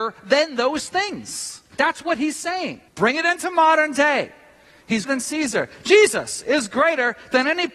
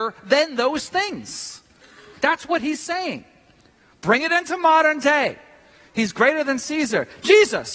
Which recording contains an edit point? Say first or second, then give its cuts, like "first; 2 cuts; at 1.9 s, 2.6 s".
first; 3 cuts; at 1.7 s, 2.9 s, 5.1 s